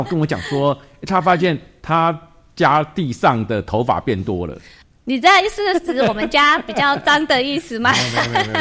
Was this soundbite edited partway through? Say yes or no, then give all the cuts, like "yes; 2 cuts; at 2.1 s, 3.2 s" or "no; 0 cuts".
yes; 1 cut; at 4.8 s